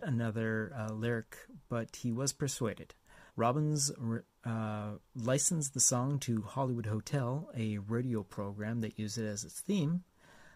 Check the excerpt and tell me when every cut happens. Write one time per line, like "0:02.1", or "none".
0:03.3